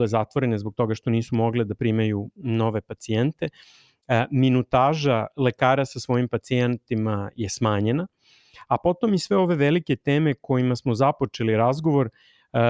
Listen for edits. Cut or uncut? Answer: uncut